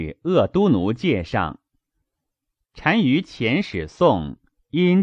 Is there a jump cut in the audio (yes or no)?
no